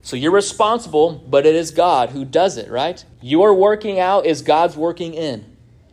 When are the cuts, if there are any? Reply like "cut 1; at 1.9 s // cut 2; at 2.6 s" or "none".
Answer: cut 1; at 3.1 s